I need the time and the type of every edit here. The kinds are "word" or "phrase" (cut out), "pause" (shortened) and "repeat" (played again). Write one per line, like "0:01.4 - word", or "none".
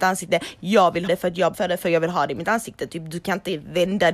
0:01.1 - word
0:01.5 - word

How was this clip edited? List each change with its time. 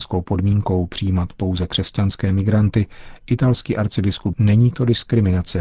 0:04.3 - word

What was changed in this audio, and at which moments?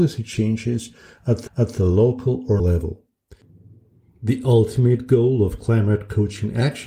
0:01.5 - repeat
0:02.6 - word

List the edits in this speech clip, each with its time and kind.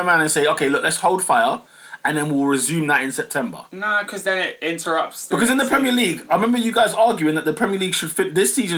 0:04.2 - word

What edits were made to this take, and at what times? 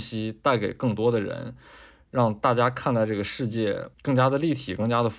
0:03.9 - pause

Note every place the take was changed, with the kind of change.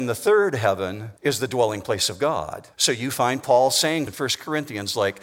0:01.2 - pause
0:02.7 - pause
0:04.1 - word

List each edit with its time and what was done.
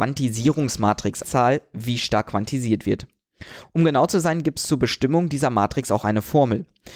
0:01.2 - phrase

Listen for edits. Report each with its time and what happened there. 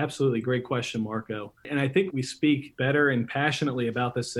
0:02.1 - word

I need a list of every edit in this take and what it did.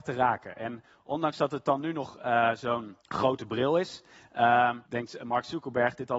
0:03.0 - pause
0:04.9 - pause

